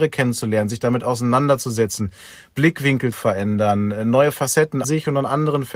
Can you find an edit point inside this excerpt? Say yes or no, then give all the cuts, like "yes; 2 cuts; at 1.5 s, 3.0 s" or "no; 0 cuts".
yes; 2 cuts; at 3.1 s, 4.8 s